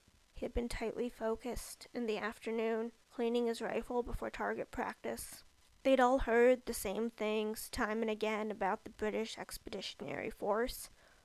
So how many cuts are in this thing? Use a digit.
2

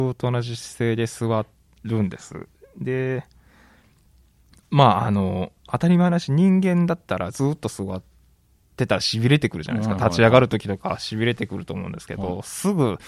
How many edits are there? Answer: 1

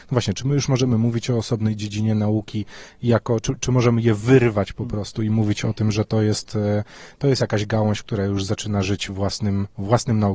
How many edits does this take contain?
0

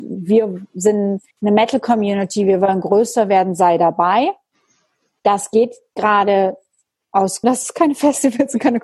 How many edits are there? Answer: 2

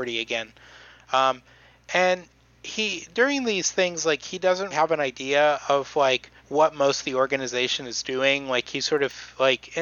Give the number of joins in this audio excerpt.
2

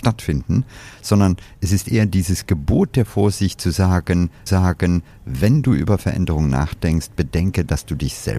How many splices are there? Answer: 1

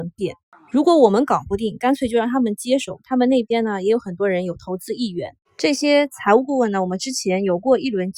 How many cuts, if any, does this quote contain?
1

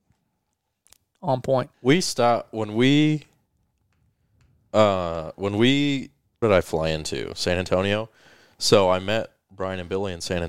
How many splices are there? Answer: 2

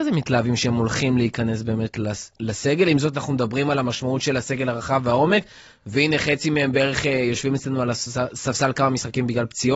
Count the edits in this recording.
0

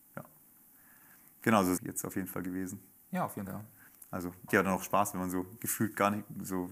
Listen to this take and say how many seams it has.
3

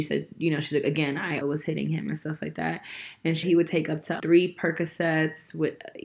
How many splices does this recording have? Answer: 3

